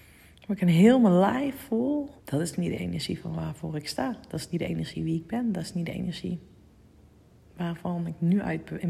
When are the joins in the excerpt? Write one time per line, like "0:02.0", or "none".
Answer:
0:02.2